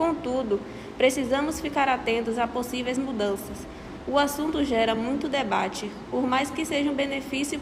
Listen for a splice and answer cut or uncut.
uncut